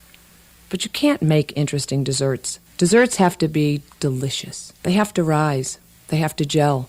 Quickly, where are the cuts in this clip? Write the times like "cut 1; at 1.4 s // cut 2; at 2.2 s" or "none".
cut 1; at 2.6 s // cut 2; at 4.8 s

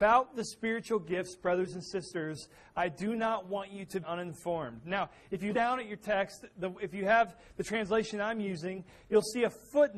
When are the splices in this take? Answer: cut 1; at 4.0 s // cut 2; at 5.5 s

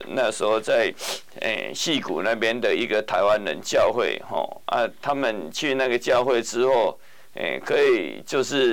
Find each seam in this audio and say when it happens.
none

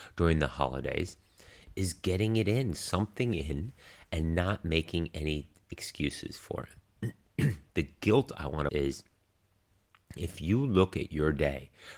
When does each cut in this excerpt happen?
cut 1; at 2.7 s // cut 2; at 8.7 s

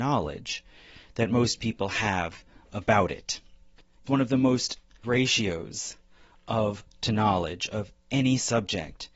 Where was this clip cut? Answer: cut 1; at 4.1 s // cut 2; at 5.0 s // cut 3; at 6.9 s

